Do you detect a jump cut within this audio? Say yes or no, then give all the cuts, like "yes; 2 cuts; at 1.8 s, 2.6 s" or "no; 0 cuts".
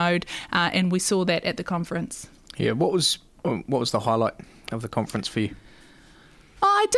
no; 0 cuts